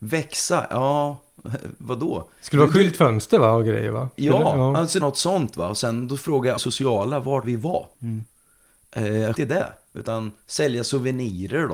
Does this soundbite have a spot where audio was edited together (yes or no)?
yes